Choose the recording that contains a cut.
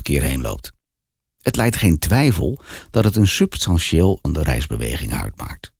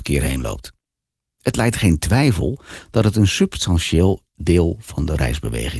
first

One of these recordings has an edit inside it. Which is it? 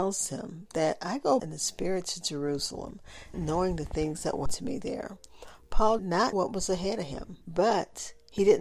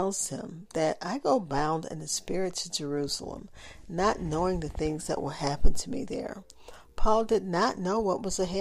first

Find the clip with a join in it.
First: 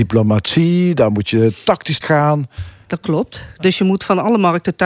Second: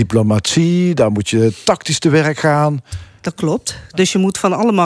first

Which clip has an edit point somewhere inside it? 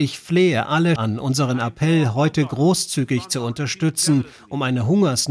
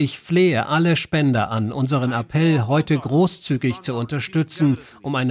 first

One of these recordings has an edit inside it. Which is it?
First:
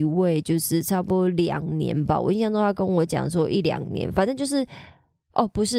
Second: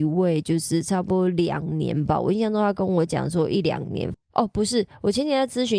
second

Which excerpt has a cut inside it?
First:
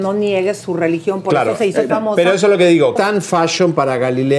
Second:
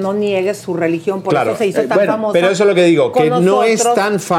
first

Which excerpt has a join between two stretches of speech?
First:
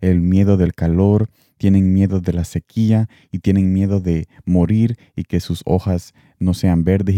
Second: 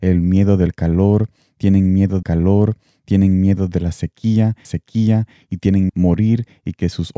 second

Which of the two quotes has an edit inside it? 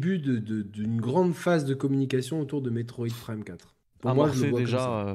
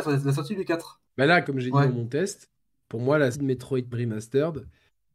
second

